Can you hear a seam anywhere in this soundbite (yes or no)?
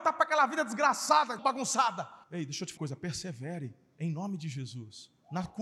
yes